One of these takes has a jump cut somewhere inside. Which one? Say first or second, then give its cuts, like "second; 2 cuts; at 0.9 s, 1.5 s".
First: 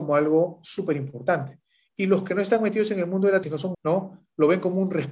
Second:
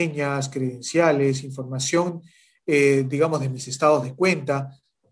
first; 2 cuts; at 3.4 s, 3.7 s